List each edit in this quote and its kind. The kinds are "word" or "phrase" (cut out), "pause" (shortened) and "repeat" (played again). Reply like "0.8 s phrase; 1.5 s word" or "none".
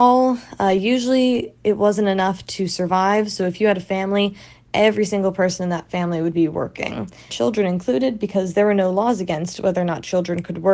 7.3 s word